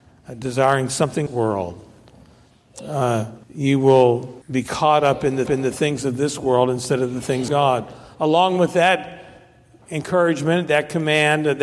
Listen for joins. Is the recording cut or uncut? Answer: cut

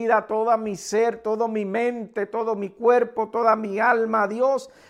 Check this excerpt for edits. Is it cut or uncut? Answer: uncut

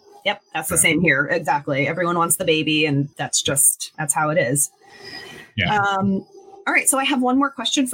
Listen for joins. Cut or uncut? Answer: cut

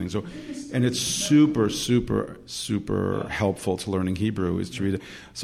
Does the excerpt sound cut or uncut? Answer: uncut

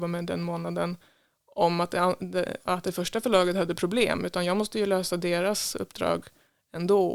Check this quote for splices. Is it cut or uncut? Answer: uncut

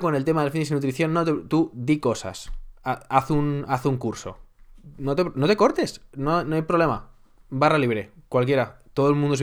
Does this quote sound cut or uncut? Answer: uncut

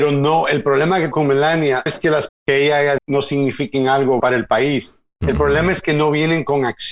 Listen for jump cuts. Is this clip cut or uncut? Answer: cut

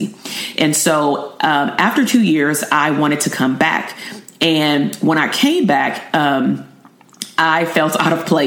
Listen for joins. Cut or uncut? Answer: uncut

